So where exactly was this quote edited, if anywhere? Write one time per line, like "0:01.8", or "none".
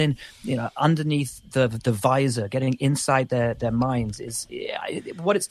none